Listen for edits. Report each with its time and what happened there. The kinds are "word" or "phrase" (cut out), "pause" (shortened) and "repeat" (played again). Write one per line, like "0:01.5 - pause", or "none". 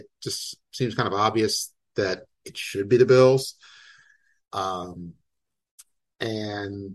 none